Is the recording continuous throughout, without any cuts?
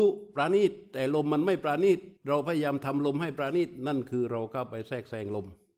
no; 1 cut; at 2.2 s

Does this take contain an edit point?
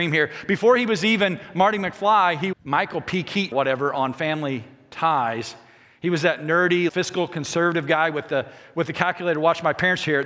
yes; 3 cuts; at 2.5 s, 3.5 s, 6.9 s

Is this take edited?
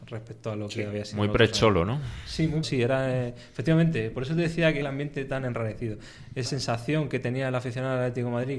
yes; 3 cuts; at 2.6 s, 4.8 s, 6.4 s

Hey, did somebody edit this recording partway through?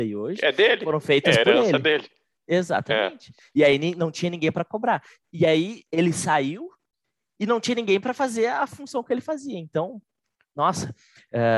no; 0 cuts

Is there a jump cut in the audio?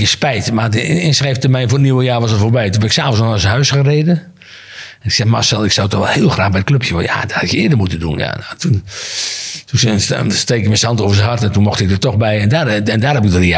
no; 0 cuts

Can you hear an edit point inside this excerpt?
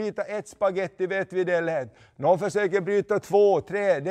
no; 0 cuts

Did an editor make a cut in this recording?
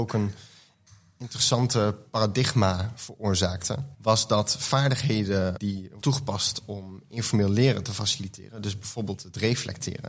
yes; 3 cuts; at 3.9 s, 5.6 s, 6.0 s

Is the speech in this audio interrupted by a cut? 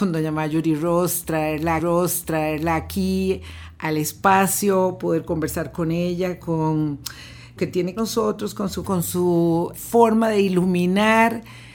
yes; 5 cuts; at 1.8 s, 7.6 s, 8.0 s, 8.8 s, 9.7 s

